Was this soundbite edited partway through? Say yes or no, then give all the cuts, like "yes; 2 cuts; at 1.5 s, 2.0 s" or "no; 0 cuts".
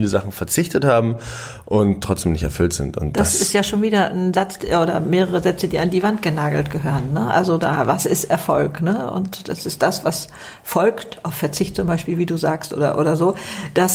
no; 0 cuts